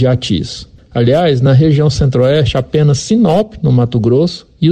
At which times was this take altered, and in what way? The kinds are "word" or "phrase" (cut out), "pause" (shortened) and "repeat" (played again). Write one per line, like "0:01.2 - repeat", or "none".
none